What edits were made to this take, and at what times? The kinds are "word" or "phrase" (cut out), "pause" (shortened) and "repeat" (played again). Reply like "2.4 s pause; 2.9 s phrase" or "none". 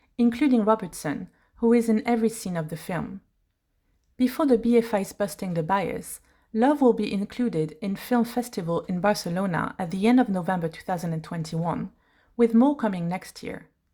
8.9 s word